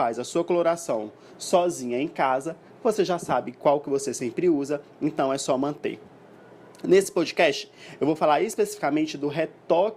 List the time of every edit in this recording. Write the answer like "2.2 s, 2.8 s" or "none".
none